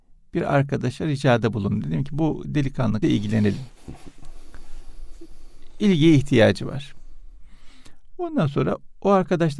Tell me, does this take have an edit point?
yes; 1 cut; at 3.0 s

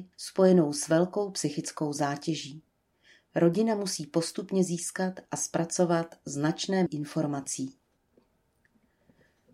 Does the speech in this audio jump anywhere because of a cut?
yes; 1 cut; at 6.9 s

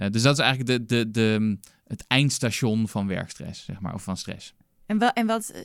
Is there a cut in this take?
no; 0 cuts

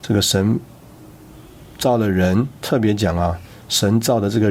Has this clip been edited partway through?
no; 0 cuts

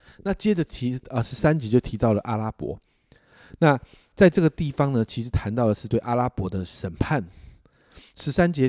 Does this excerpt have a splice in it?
no; 0 cuts

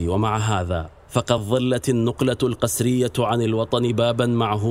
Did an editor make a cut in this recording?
no; 0 cuts

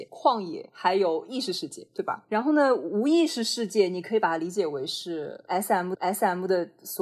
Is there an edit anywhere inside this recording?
yes; 1 cut; at 5.9 s

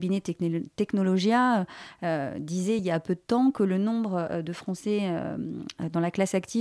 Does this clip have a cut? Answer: no; 0 cuts

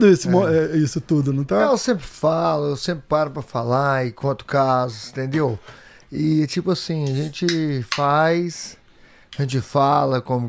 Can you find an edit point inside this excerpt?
no; 0 cuts

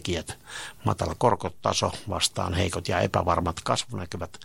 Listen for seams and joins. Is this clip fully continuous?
yes; 0 cuts

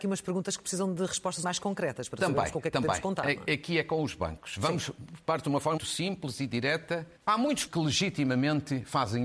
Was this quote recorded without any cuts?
no; 4 cuts; at 1.4 s, 5.8 s, 7.2 s, 7.7 s

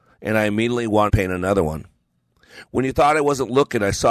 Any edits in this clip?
yes; 1 cut; at 1.1 s

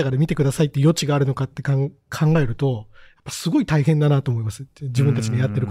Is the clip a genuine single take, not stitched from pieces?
yes; 0 cuts

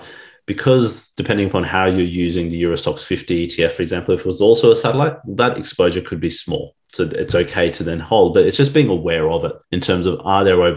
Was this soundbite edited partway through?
yes; 2 cuts; at 1.1 s, 9.6 s

